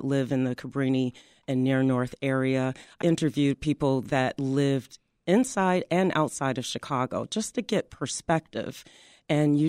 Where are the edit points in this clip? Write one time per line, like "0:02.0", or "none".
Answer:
0:03.0